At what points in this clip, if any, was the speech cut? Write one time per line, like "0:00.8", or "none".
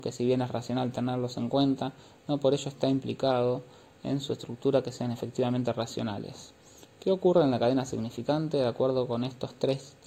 none